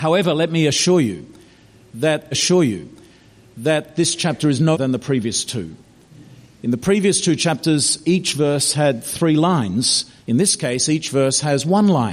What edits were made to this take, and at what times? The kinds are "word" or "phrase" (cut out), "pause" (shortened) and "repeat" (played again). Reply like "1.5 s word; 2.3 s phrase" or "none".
2.3 s repeat; 4.7 s word; 10.2 s pause